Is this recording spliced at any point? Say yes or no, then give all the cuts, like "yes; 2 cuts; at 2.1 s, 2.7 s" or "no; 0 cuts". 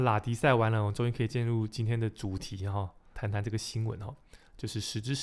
yes; 1 cut; at 3.1 s